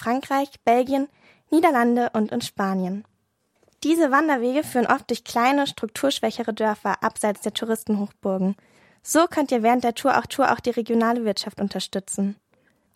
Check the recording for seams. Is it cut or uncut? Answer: cut